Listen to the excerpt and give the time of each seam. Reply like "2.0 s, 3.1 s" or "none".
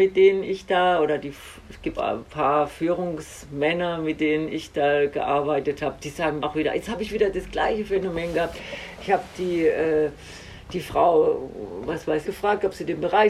2.0 s, 6.4 s, 12.2 s

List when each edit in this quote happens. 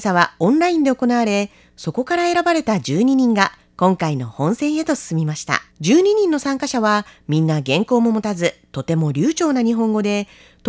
5.7 s

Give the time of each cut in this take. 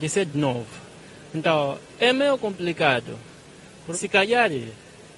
3.9 s

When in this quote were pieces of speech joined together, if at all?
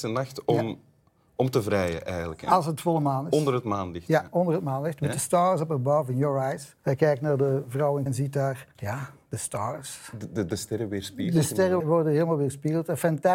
6.8 s, 8.1 s, 8.7 s, 11.8 s

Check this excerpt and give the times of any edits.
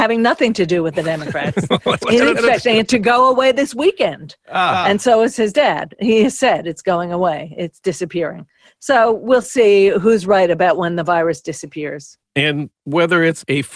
none

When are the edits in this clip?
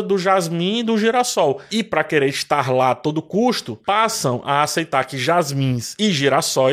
none

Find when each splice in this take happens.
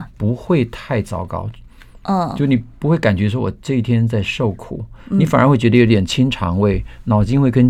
none

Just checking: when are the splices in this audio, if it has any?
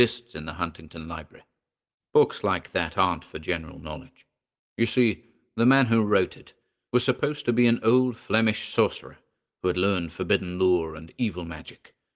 none

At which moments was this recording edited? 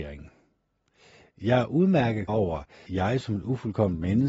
2.3 s, 2.9 s

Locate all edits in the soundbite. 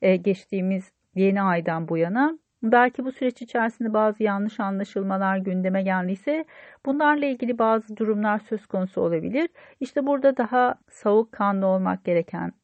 10.8 s

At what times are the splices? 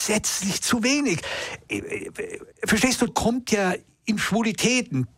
2.5 s, 3.1 s

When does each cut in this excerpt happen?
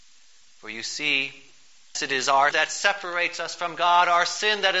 1.9 s, 2.5 s

